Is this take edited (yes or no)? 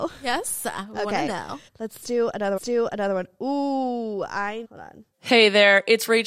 yes